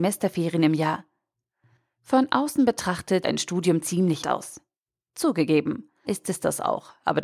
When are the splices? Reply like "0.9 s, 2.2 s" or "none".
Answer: 3.2 s, 4.2 s, 6.0 s